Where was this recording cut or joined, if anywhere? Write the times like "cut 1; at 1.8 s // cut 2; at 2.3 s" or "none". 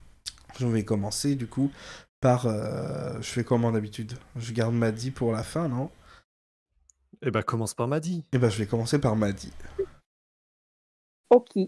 none